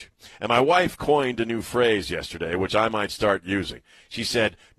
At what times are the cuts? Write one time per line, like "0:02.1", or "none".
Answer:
none